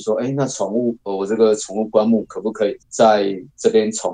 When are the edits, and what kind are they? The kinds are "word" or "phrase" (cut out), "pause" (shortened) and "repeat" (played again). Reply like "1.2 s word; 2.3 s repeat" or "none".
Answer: 2.8 s pause